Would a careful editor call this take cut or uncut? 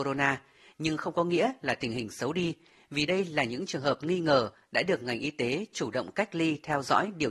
uncut